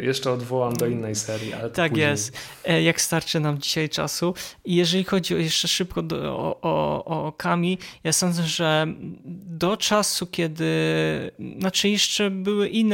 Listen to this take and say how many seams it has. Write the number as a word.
zero